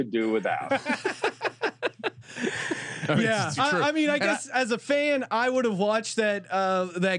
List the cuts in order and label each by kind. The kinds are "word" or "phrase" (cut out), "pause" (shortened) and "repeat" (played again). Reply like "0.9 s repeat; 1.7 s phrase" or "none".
3.6 s word